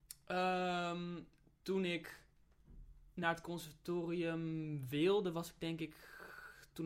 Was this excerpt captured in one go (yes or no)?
yes